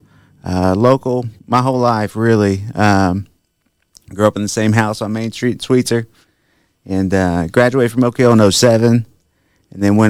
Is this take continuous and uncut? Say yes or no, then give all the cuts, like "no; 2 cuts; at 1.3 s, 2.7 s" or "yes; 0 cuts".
no; 1 cut; at 1.4 s